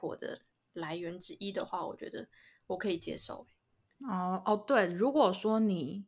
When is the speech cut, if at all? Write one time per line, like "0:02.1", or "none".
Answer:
none